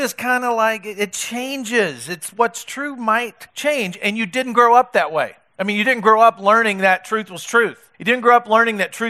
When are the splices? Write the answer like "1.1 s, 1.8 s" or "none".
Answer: 3.5 s, 5.5 s, 7.9 s